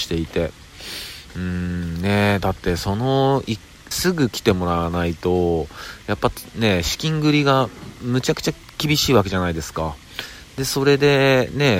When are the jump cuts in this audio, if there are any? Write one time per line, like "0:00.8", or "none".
0:03.9